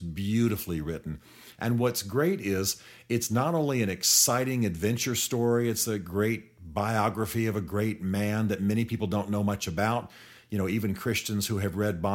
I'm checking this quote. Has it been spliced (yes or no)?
no